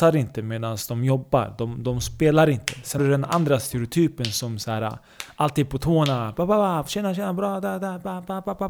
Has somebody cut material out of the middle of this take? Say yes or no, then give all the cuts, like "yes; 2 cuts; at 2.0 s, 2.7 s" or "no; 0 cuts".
yes; 1 cut; at 3.0 s